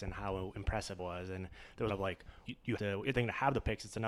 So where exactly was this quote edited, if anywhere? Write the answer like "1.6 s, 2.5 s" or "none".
1.0 s, 1.9 s, 2.5 s, 2.8 s, 3.1 s